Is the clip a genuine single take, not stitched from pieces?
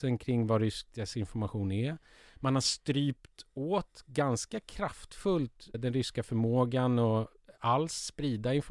no; 1 cut; at 5.7 s

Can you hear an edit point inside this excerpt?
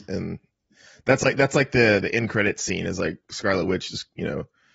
yes; 1 cut; at 2.0 s

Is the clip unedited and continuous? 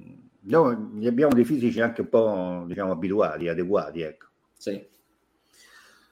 no; 1 cut; at 4.4 s

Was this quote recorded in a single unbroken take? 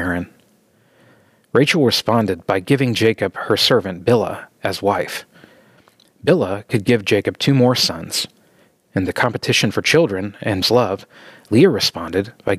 no; 1 cut; at 10.6 s

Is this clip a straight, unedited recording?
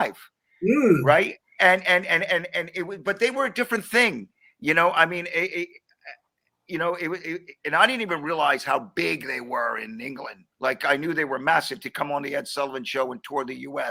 no; 1 cut; at 10.5 s

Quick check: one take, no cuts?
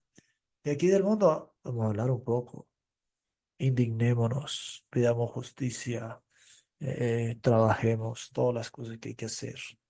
yes; 0 cuts

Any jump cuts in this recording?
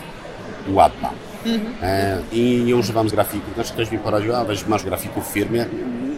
yes; 4 cuts; at 3.1 s, 3.7 s, 4.5 s, 4.8 s

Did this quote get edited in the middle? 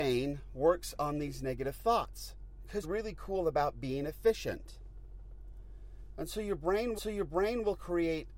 yes; 2 cuts; at 2.8 s, 7.0 s

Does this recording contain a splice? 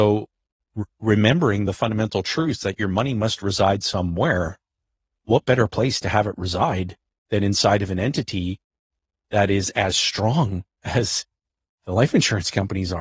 no; 0 cuts

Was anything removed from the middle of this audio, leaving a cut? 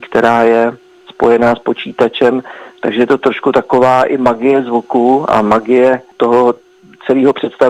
no; 0 cuts

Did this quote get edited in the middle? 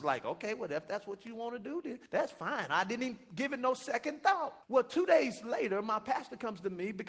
yes; 2 cuts; at 2.1 s, 4.6 s

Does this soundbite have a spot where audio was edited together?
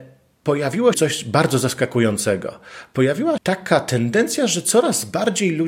yes; 2 cuts; at 0.9 s, 3.4 s

